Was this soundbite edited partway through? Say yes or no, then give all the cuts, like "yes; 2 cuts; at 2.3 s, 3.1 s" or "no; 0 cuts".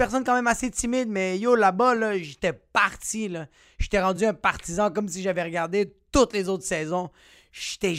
no; 0 cuts